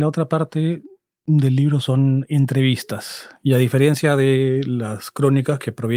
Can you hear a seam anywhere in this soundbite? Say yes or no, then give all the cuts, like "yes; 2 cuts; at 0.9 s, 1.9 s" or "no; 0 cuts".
no; 0 cuts